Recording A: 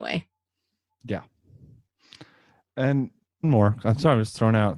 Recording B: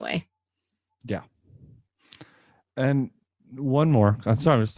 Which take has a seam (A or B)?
A